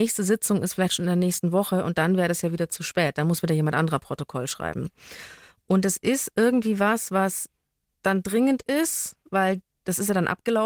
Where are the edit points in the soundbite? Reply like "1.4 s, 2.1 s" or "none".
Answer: none